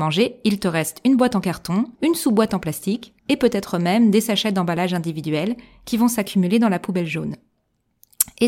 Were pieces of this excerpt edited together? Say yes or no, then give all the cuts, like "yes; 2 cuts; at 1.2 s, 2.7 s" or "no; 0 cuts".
yes; 2 cuts; at 1.9 s, 3.2 s